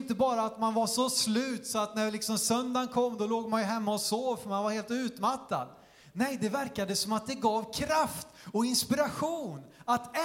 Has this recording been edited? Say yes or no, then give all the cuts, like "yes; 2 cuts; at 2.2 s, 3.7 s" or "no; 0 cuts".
no; 0 cuts